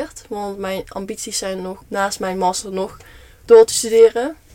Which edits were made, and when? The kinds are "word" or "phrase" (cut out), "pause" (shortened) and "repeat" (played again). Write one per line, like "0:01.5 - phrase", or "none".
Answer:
0:01.8 - word